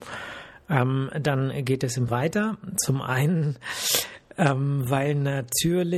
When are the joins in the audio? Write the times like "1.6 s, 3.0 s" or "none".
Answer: 2.1 s

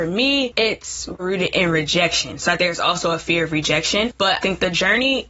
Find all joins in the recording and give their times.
1.2 s, 2.6 s, 4.4 s

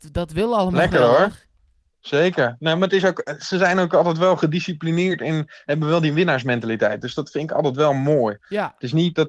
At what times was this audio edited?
none

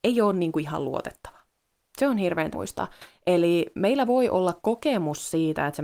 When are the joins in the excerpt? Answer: 2.5 s

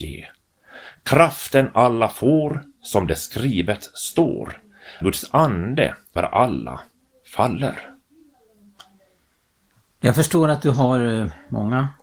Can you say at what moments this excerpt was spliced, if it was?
5.0 s, 6.2 s

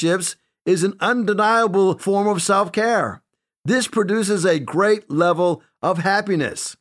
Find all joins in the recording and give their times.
none

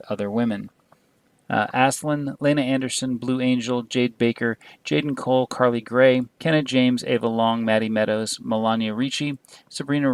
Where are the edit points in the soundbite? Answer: 6.3 s

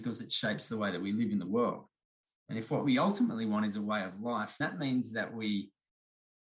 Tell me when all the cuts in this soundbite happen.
4.6 s

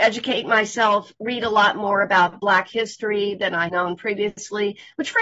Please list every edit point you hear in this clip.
3.7 s

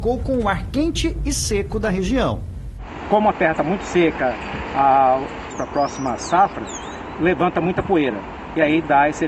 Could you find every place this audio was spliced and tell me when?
5.5 s

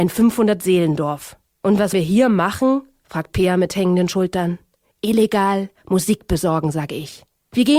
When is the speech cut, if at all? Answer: 1.9 s

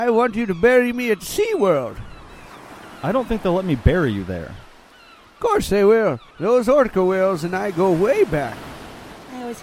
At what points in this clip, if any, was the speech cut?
6.3 s

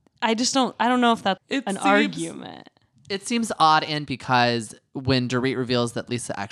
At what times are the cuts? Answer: 1.4 s, 4.1 s

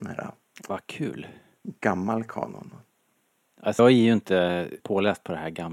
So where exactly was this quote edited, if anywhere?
3.8 s, 4.8 s

